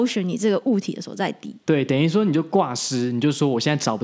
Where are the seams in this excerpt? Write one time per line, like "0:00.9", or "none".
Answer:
0:01.6